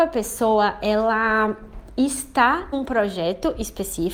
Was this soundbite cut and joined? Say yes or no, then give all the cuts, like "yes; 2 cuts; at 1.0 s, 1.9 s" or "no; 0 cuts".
yes; 1 cut; at 2.7 s